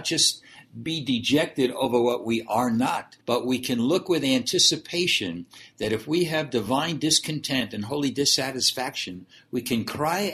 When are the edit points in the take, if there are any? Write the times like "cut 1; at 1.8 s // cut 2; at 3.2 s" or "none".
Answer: cut 1; at 3.2 s